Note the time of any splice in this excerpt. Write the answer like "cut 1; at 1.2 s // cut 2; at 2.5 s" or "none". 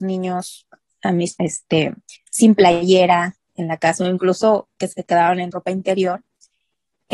cut 1; at 1.4 s // cut 2; at 2.1 s